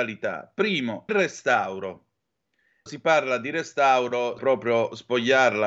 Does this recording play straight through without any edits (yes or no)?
no